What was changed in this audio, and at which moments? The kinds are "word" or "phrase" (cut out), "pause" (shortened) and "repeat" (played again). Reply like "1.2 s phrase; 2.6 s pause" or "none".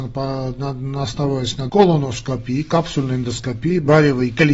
1.7 s word